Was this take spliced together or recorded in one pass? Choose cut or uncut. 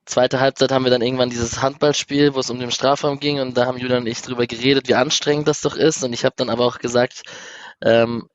uncut